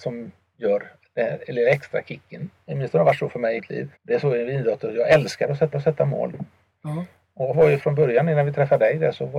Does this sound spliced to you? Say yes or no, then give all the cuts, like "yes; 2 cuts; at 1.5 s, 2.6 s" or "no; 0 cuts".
yes; 4 cuts; at 3.6 s, 3.9 s, 5.7 s, 7.5 s